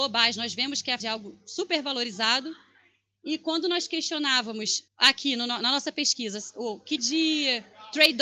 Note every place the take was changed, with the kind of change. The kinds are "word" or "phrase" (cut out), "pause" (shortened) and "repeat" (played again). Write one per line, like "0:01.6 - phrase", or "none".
0:01.0 - word
0:04.9 - pause
0:07.0 - word